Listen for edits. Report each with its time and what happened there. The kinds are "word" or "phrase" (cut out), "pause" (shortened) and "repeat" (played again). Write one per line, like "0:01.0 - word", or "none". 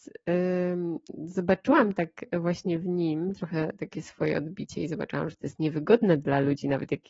none